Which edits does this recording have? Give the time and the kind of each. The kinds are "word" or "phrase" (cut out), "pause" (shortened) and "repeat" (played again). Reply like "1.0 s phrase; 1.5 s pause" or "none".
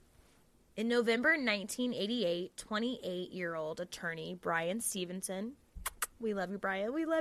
none